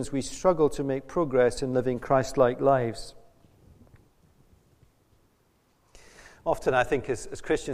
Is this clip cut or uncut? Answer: uncut